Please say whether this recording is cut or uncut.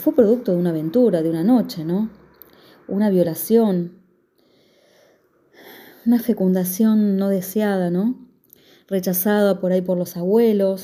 uncut